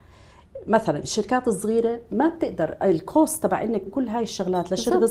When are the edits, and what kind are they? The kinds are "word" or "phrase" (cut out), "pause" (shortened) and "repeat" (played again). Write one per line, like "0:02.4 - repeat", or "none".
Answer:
0:03.9 - word